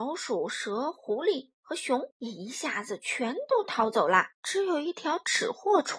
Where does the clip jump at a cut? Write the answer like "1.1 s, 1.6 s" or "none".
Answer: 2.1 s, 4.3 s